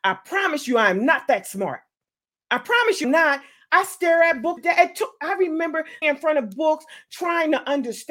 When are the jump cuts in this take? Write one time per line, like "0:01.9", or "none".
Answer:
0:03.0
0:04.6
0:06.0